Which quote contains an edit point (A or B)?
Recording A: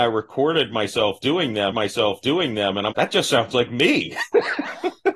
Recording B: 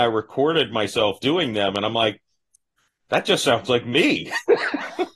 A